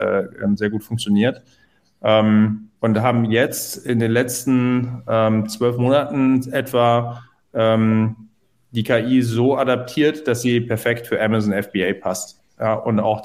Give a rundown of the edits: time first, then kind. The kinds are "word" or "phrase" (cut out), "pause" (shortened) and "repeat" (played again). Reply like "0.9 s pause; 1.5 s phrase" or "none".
2.8 s pause